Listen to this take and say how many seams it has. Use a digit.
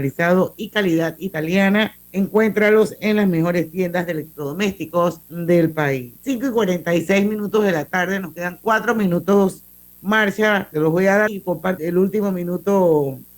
6